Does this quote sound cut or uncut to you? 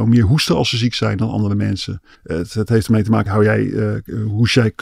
cut